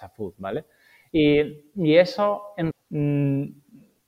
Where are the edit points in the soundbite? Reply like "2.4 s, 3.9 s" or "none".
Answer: 2.7 s